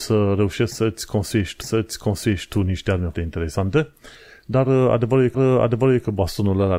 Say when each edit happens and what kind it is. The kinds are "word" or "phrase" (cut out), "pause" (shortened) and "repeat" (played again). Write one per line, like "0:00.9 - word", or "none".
0:01.6 - repeat
0:03.1 - word
0:05.3 - repeat